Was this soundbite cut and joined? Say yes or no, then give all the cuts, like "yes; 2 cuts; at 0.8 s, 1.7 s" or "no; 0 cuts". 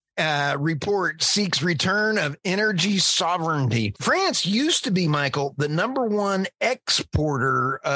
no; 0 cuts